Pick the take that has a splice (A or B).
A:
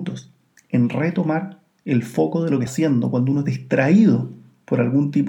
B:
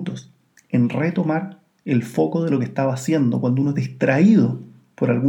A